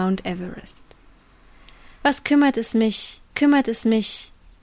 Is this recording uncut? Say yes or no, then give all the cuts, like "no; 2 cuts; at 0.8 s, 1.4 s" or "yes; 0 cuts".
no; 1 cut; at 3.3 s